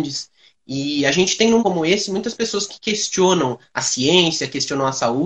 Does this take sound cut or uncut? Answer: cut